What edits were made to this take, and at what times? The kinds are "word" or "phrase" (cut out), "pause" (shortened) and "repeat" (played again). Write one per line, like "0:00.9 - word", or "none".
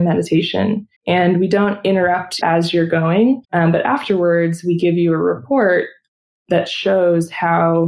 0:01.0 - pause
0:02.4 - phrase
0:03.4 - pause